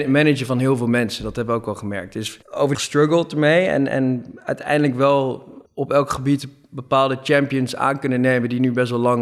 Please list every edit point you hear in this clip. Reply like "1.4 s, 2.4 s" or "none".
2.4 s, 2.7 s, 5.7 s